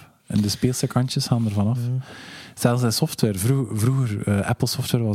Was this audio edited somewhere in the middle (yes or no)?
no